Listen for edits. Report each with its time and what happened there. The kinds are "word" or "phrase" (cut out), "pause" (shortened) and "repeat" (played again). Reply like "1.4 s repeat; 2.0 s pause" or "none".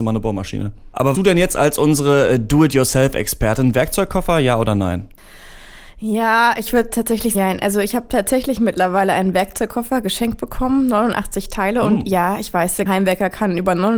1.1 s phrase; 7.3 s word; 12.9 s word